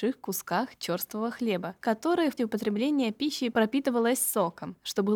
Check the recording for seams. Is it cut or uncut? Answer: cut